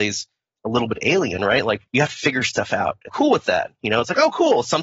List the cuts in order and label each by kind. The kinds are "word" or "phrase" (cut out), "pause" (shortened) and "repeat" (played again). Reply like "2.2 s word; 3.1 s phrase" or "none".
1.9 s pause; 3.1 s word

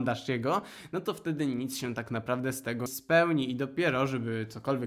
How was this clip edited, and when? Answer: 2.9 s word

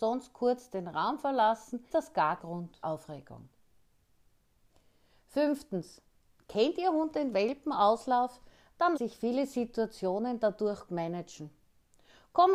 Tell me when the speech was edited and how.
1.9 s word; 2.4 s word; 2.8 s word; 9.0 s word; 10.9 s word

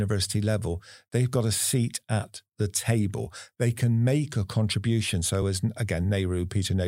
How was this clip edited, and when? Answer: none

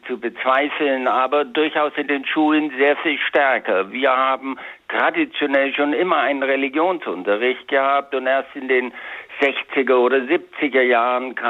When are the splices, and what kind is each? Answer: none

